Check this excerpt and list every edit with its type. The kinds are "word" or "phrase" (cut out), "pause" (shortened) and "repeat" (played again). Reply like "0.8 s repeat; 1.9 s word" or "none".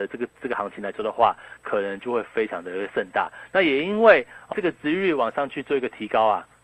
4.5 s word